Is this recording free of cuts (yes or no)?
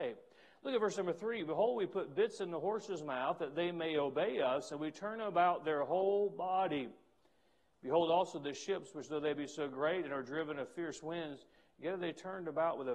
yes